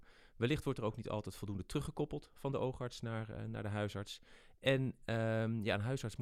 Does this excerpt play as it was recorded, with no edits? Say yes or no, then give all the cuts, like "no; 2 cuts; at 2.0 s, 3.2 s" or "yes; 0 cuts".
yes; 0 cuts